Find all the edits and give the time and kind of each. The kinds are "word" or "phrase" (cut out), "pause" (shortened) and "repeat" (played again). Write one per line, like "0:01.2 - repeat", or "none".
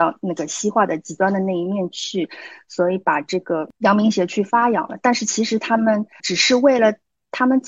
0:06.2 - word